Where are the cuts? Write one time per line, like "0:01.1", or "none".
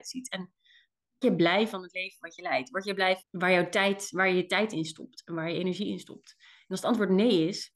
0:01.2
0:03.2